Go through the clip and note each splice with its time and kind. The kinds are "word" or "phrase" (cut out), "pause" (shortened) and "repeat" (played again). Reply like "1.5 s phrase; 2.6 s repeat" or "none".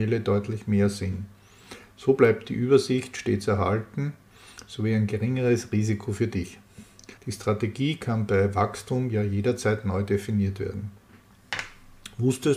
7.2 s pause